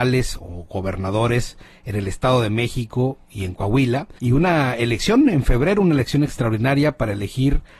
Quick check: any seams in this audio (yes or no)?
yes